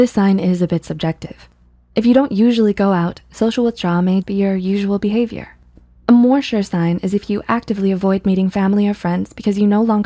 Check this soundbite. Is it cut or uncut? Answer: cut